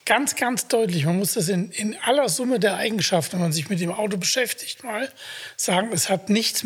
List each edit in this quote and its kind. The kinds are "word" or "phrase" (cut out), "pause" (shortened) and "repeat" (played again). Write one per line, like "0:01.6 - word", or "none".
none